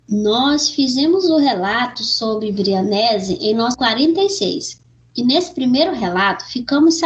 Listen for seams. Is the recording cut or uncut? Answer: cut